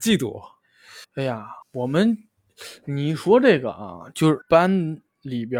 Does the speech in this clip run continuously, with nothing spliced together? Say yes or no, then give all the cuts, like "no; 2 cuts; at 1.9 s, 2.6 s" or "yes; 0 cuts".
no; 3 cuts; at 1.0 s, 1.6 s, 4.4 s